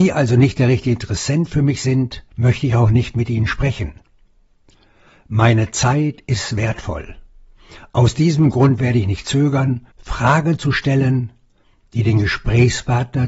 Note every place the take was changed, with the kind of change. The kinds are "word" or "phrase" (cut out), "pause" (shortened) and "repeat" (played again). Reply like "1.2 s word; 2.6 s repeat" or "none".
2.3 s pause; 9.9 s pause